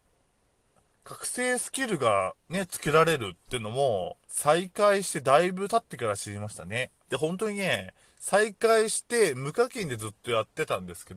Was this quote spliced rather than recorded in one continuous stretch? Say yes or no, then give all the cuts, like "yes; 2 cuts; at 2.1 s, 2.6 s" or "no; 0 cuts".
yes; 2 cuts; at 4.2 s, 7.0 s